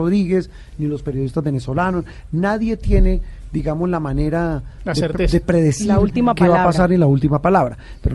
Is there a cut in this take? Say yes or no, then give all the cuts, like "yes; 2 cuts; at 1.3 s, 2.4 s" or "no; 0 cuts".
no; 0 cuts